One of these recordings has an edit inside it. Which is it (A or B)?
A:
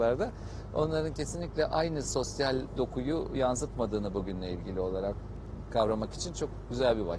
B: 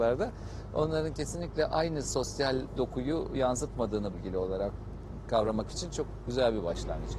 B